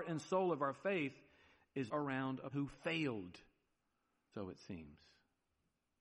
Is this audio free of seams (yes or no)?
no